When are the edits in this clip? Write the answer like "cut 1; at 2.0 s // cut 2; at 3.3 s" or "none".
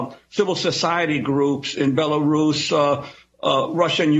none